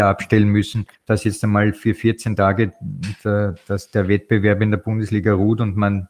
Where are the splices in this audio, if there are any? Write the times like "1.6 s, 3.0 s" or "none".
0.9 s